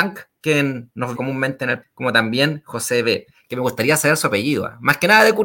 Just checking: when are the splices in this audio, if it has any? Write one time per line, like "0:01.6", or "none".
0:01.1
0:01.8